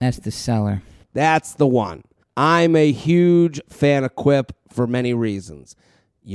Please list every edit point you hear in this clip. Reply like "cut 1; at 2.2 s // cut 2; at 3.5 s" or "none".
cut 1; at 2.2 s